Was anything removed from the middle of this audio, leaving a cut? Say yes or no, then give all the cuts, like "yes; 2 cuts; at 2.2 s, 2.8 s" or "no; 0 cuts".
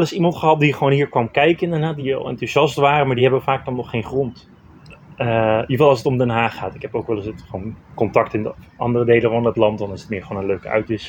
no; 0 cuts